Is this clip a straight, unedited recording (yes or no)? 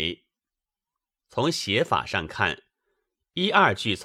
yes